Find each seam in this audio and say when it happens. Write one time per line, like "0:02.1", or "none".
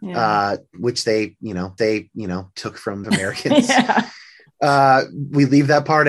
0:01.8
0:03.0